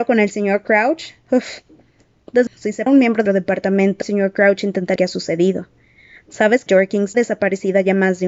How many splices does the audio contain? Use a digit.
7